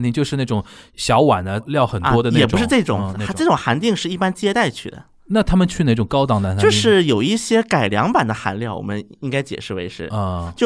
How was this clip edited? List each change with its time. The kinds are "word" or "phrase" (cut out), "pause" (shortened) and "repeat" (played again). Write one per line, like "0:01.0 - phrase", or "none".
none